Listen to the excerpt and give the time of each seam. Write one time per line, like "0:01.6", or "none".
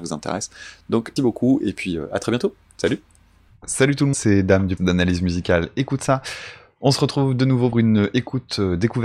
0:01.2
0:04.1
0:04.8
0:07.7